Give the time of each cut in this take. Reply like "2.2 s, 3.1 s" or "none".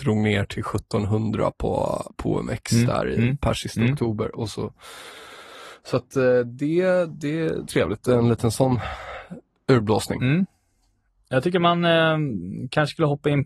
7.7 s

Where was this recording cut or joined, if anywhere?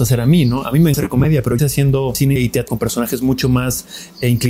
0.9 s, 1.6 s, 2.4 s, 2.7 s

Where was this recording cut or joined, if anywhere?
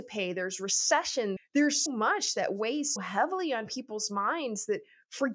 1.4 s, 1.9 s, 3.0 s

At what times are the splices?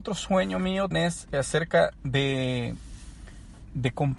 0.9 s, 1.3 s

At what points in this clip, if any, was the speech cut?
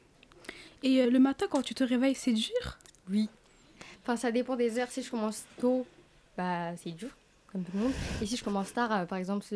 1.0 s

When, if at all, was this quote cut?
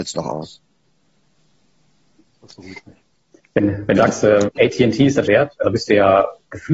4.0 s, 5.3 s, 5.6 s

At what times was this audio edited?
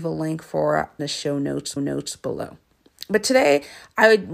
1.0 s, 1.8 s

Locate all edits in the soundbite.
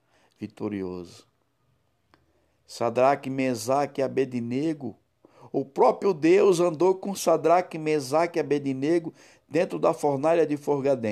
none

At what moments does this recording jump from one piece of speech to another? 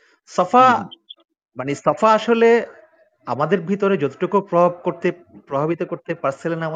none

